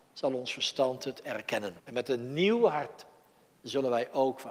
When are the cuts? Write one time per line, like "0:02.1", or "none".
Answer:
0:01.8